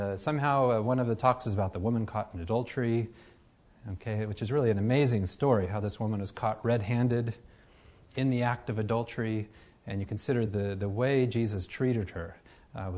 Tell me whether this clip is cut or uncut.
uncut